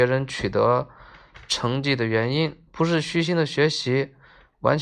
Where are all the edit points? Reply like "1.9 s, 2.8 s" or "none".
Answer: 2.7 s